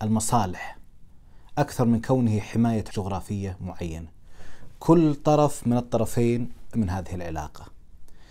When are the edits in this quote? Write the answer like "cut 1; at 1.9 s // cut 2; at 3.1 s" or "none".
cut 1; at 2.9 s // cut 2; at 6.7 s